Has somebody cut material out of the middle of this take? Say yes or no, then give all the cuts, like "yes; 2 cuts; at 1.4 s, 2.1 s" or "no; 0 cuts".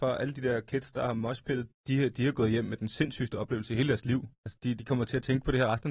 no; 0 cuts